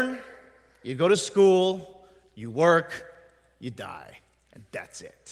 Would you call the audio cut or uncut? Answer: uncut